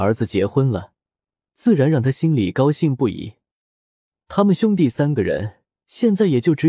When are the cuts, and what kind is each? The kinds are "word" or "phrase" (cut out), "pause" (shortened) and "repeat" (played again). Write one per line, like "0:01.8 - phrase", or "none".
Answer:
0:05.8 - pause